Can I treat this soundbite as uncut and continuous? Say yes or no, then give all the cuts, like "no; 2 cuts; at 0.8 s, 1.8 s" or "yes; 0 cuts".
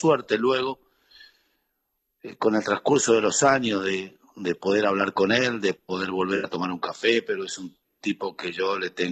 yes; 0 cuts